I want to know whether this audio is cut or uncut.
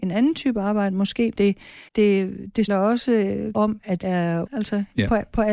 cut